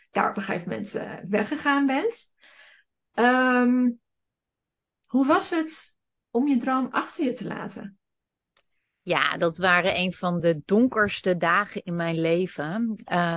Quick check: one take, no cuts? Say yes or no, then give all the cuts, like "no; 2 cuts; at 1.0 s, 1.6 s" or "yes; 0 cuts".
yes; 0 cuts